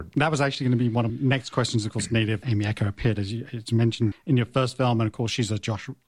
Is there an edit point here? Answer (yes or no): yes